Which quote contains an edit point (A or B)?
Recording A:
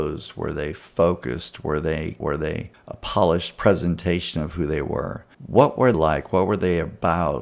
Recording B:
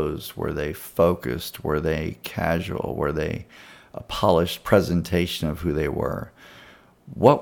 A